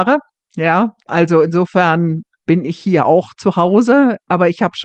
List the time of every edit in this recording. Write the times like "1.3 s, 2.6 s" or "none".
1.0 s